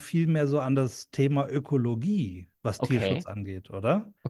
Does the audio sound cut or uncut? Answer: uncut